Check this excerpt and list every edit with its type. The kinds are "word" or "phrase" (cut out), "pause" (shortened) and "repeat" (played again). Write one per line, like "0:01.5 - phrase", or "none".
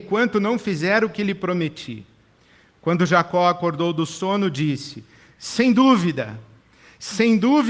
none